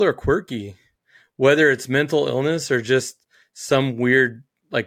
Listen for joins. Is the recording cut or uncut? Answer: uncut